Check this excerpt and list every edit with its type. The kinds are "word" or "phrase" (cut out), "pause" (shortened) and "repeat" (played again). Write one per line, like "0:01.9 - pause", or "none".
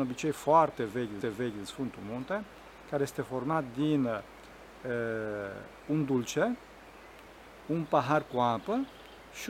0:01.2 - repeat